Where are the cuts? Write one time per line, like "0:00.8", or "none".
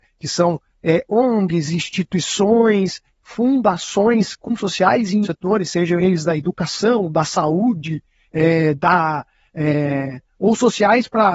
0:04.6
0:05.2